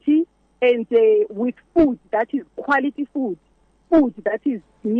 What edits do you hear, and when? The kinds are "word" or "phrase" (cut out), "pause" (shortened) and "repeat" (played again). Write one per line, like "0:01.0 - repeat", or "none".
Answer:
none